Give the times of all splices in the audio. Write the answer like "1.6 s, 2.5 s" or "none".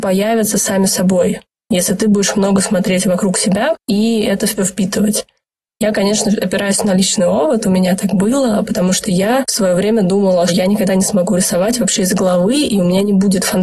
4.6 s, 10.5 s